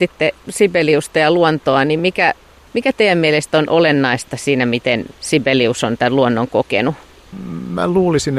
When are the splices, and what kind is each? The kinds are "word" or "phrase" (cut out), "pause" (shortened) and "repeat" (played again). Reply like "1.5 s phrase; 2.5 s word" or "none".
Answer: none